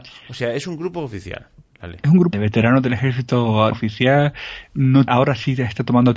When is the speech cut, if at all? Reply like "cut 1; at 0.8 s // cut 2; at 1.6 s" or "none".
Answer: cut 1; at 2.3 s // cut 2; at 3.7 s // cut 3; at 5.1 s